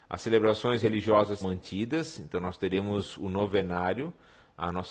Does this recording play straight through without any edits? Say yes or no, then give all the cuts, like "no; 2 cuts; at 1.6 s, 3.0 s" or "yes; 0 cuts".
no; 1 cut; at 1.4 s